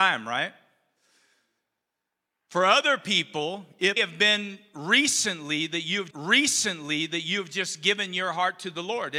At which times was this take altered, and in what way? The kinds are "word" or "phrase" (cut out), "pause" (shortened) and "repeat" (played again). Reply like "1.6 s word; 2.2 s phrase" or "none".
4.0 s word; 6.1 s repeat